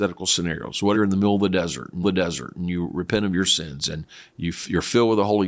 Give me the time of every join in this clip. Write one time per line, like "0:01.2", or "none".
0:00.9
0:02.0